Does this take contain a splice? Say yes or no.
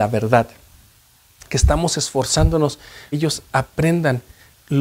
yes